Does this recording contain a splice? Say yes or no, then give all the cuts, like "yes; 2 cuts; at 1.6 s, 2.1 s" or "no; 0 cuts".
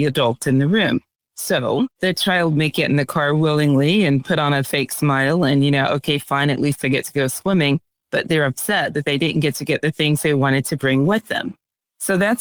no; 0 cuts